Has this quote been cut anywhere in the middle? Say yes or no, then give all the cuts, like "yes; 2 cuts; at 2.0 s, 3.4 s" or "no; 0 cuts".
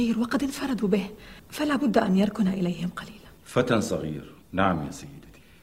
yes; 3 cuts; at 1.4 s, 3.4 s, 4.4 s